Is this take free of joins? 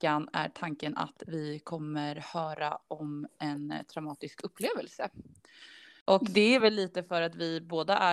yes; 0 cuts

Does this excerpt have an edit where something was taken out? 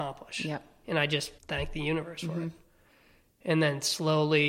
yes; 1 cut; at 1.4 s

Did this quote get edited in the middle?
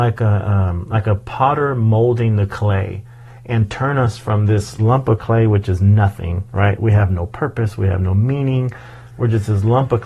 no; 0 cuts

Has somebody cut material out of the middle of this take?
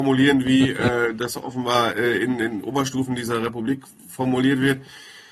no; 0 cuts

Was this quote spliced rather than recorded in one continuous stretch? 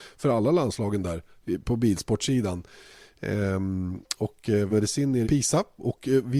yes; 2 cuts; at 4.7 s, 5.2 s

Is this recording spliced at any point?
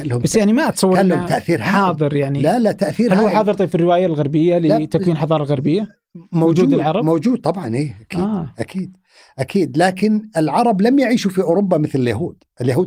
no; 0 cuts

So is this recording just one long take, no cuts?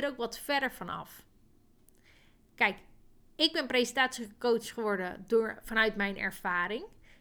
yes; 0 cuts

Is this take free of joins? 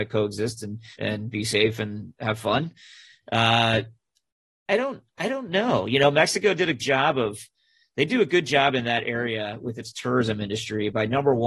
no; 3 cuts; at 0.9 s, 5.1 s, 6.8 s

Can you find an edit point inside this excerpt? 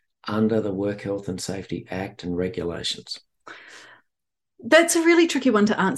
no; 0 cuts

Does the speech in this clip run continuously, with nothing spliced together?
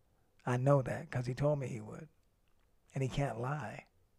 yes; 0 cuts

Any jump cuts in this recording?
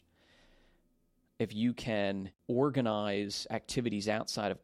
yes; 1 cut; at 2.4 s

